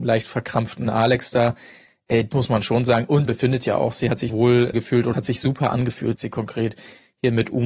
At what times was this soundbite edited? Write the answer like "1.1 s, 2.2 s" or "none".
2.3 s, 3.3 s, 4.3 s, 4.7 s, 5.1 s, 6.2 s